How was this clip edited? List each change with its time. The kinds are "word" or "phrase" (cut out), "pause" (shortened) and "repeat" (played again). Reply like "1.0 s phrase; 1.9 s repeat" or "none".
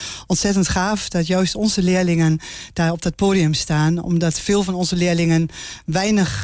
none